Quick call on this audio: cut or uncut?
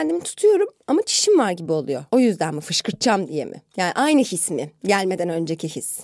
uncut